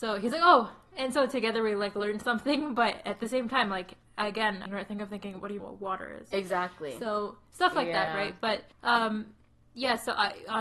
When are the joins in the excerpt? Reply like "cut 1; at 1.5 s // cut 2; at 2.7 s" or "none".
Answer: cut 1; at 4.7 s // cut 2; at 5.6 s // cut 3; at 8.7 s